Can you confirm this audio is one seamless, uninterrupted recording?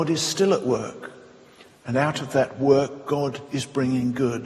yes; 0 cuts

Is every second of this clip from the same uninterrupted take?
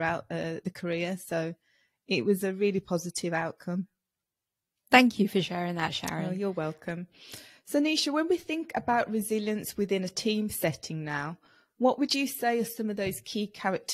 yes; 0 cuts

